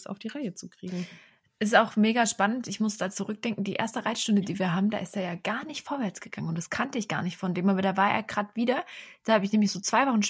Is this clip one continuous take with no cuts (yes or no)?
yes